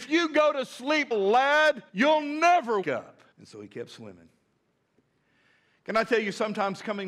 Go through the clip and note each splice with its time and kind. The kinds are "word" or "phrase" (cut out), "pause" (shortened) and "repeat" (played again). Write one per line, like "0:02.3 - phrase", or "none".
0:01.1 - word
0:01.9 - pause
0:02.8 - word
0:03.3 - pause